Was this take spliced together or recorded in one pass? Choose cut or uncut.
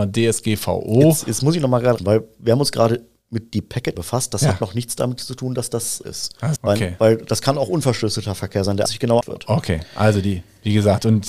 cut